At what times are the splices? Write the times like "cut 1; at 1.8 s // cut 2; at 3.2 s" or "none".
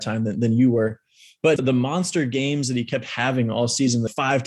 cut 1; at 1.6 s